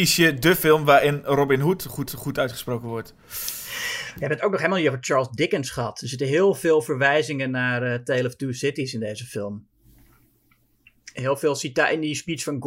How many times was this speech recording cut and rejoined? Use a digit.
1